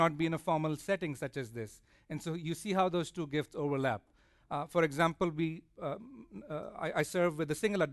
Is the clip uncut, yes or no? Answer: yes